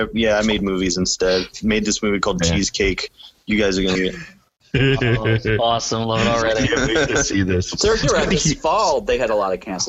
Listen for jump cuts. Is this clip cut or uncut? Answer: cut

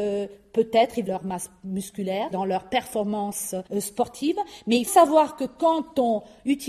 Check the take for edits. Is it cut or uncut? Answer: cut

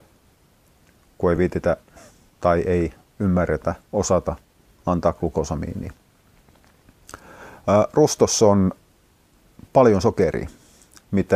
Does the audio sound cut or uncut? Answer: uncut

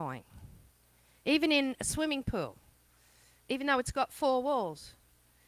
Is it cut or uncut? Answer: uncut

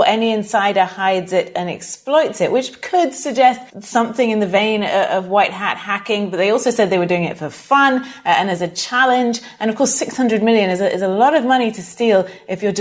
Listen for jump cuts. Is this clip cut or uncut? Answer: cut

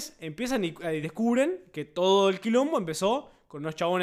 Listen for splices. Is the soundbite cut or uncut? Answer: uncut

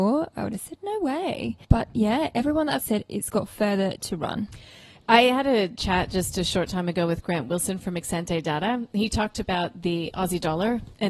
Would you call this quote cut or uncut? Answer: cut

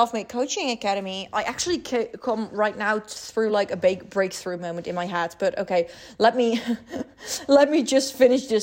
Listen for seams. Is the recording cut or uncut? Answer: uncut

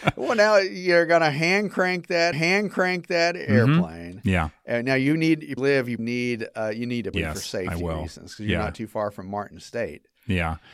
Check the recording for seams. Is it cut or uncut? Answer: cut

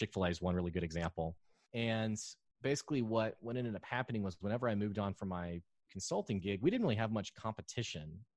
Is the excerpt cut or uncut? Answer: uncut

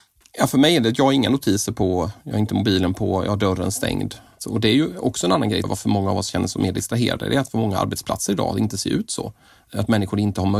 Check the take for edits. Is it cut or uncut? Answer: cut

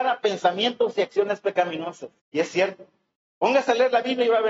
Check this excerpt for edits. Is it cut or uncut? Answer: cut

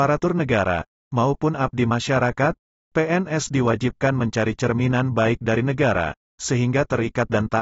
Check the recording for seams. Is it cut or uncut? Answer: uncut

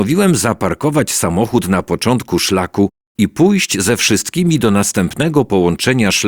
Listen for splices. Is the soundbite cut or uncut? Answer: uncut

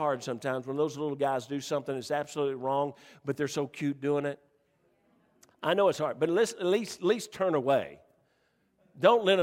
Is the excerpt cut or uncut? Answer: uncut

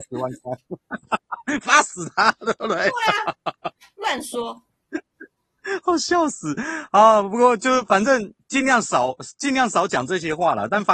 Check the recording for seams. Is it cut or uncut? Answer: uncut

